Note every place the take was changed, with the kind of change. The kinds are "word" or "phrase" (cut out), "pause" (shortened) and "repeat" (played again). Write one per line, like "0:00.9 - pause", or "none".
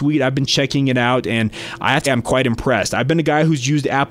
0:02.1 - word